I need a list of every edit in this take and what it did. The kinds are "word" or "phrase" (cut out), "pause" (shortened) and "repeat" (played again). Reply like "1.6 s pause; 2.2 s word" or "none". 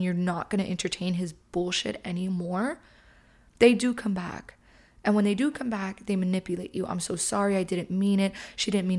none